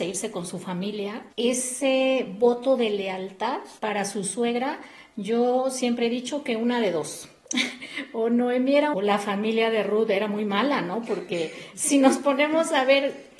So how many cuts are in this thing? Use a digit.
3